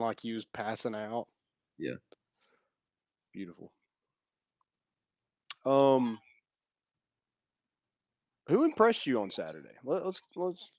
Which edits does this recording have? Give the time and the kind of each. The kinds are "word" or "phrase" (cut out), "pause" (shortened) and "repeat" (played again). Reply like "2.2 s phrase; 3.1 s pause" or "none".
none